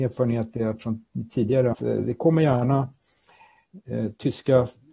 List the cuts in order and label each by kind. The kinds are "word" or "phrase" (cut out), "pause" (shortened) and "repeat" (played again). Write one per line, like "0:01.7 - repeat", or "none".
0:01.7 - word